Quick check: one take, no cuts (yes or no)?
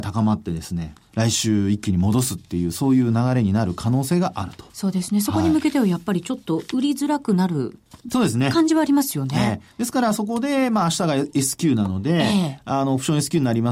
no